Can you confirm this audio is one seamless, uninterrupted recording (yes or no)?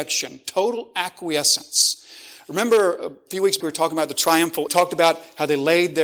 no